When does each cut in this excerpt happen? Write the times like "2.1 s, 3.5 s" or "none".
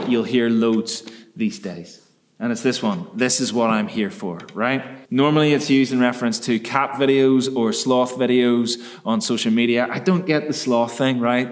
5.1 s